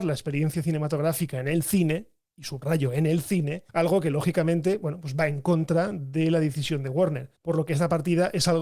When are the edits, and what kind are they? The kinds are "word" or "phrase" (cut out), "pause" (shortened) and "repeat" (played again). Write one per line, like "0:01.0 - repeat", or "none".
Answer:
0:03.7 - pause
0:07.4 - pause